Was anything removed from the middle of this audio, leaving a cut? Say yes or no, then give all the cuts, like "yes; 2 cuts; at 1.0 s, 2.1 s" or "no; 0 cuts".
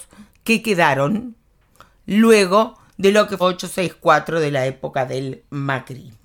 yes; 1 cut; at 3.4 s